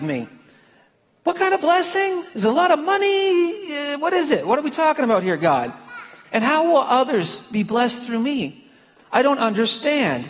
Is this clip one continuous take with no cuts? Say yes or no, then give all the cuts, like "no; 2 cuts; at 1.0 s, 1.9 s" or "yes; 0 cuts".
yes; 0 cuts